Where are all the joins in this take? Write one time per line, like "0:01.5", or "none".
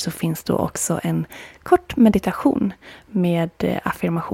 none